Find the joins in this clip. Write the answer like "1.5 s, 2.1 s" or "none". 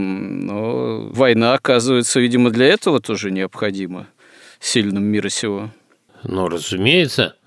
none